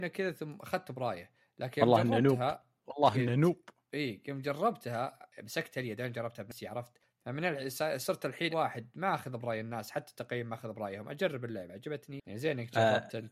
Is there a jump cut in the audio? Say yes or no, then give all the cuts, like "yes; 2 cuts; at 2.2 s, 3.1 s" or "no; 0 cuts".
yes; 1 cut; at 8.5 s